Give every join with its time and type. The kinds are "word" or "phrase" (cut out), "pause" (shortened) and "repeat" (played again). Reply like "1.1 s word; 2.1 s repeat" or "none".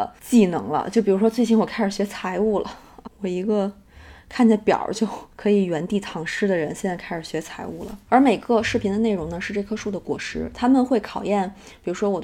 3.0 s word; 5.3 s pause

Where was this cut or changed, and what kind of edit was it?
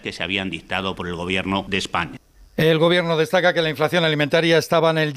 none

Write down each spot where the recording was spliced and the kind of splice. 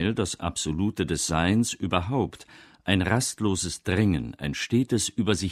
none

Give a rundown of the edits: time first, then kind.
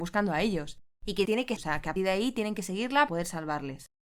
1.2 s word; 1.6 s word; 2.0 s word; 3.1 s word

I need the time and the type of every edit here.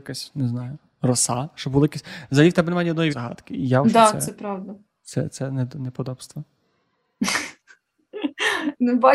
3.1 s word; 3.8 s word

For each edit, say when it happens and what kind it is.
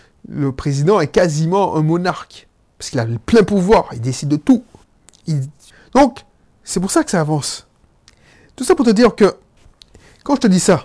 none

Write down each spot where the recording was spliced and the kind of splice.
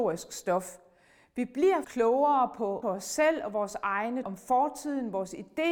1.8 s word; 2.8 s phrase; 4.2 s word

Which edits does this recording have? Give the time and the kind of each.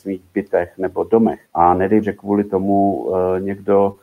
1.4 s pause; 2.0 s word

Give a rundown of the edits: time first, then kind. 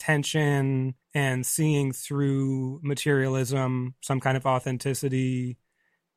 1.0 s pause

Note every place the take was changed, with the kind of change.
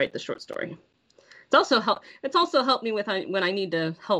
none

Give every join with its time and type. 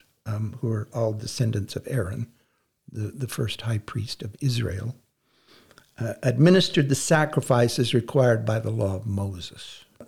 none

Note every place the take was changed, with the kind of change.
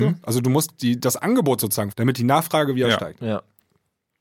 1.9 s word

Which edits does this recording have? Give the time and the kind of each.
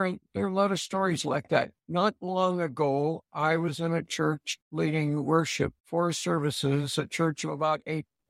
1.8 s pause; 4.6 s pause; 5.8 s pause

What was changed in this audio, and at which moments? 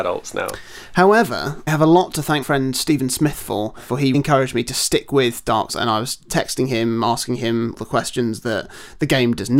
1.7 s word; 2.4 s word; 4.1 s word; 5.7 s word; 7.8 s word

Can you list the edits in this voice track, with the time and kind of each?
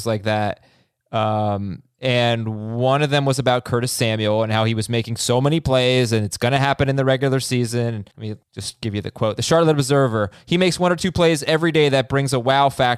8.1 s pause; 8.4 s pause

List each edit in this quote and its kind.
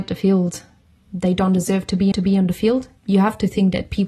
2.1 s repeat; 3.0 s pause

